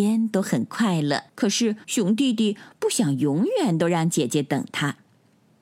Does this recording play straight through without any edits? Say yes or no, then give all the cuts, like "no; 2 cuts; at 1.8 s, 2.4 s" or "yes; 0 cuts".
no; 2 cuts; at 1.3 s, 1.8 s